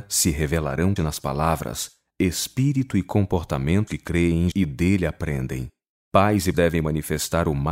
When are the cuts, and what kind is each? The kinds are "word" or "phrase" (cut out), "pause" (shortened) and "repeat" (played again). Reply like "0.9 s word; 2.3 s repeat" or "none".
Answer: 1.0 s word; 3.9 s word; 4.5 s word; 6.5 s word